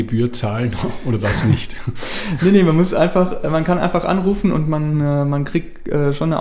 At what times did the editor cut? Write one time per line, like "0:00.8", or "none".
none